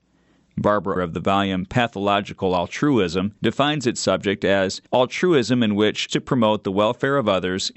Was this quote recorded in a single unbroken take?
no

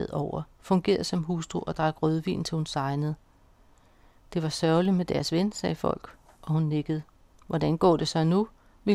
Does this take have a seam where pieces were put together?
no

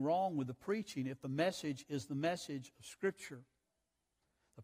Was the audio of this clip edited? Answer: no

